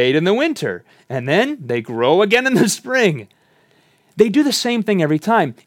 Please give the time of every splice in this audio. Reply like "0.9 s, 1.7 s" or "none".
none